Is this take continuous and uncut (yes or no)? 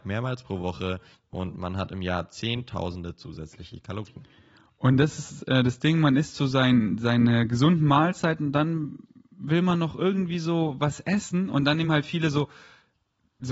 yes